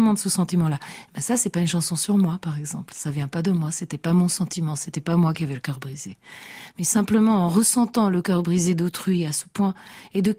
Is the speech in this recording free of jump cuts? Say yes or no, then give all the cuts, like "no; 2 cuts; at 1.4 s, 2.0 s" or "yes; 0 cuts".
yes; 0 cuts